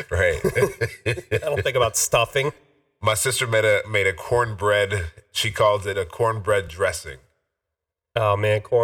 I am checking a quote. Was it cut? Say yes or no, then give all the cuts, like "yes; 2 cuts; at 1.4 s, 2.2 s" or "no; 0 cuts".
no; 0 cuts